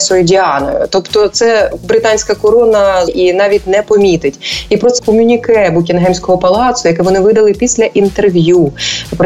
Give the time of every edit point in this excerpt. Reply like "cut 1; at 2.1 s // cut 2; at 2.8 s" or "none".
cut 1; at 3.1 s // cut 2; at 5.0 s